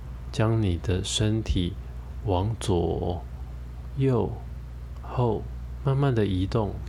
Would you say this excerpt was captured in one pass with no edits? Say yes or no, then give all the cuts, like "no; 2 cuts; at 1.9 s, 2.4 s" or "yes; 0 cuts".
no; 1 cut; at 5.0 s